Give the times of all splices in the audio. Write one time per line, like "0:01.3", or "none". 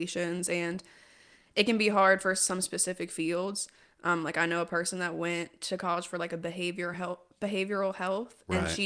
none